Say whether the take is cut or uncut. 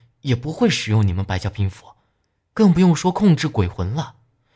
uncut